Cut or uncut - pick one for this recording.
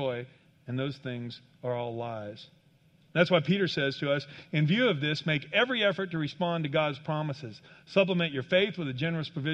uncut